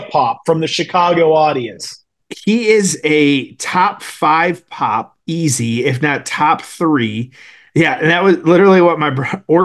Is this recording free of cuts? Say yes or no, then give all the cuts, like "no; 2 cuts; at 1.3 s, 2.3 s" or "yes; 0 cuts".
yes; 0 cuts